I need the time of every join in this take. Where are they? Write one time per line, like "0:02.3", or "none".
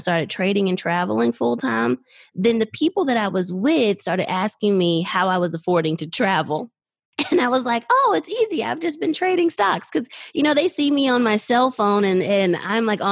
none